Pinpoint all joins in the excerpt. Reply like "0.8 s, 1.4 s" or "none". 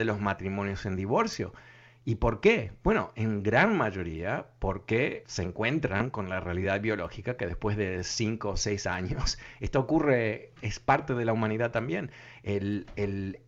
5.2 s